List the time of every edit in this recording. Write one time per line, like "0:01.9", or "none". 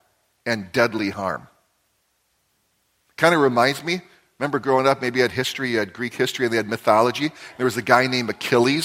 none